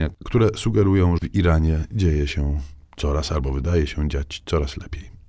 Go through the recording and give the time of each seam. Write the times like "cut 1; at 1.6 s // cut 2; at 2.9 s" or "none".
cut 1; at 1.2 s